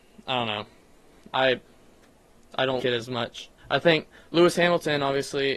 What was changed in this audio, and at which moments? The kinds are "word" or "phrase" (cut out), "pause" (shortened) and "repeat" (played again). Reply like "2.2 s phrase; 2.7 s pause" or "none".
2.8 s word; 3.6 s pause